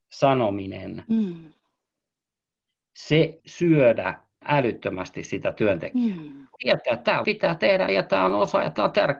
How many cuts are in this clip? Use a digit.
5